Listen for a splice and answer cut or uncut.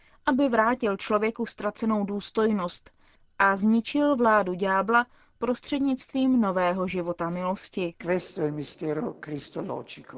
uncut